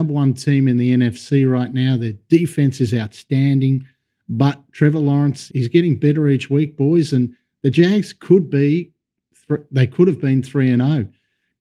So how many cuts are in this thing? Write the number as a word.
one